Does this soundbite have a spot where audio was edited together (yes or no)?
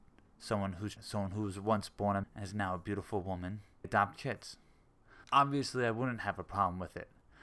yes